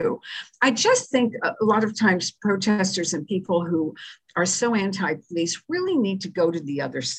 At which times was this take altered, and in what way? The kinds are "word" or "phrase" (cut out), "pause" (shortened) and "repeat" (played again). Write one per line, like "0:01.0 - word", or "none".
none